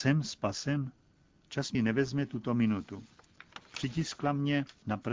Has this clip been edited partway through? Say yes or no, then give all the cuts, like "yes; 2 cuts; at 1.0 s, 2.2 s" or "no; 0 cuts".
yes; 1 cut; at 1.7 s